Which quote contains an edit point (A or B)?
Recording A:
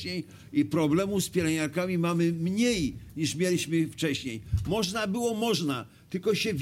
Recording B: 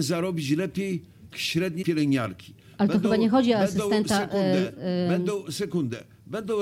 B